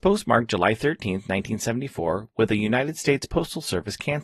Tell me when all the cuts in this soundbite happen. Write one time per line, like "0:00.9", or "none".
none